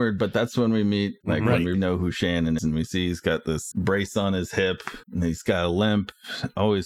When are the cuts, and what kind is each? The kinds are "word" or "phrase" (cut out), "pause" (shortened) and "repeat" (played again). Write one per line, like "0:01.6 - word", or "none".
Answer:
0:01.2 - word
0:01.7 - word
0:02.6 - word
0:03.7 - word
0:05.0 - word